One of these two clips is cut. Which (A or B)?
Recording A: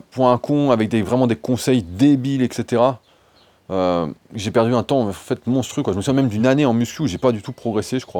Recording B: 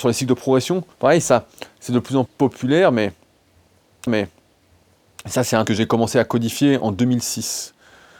B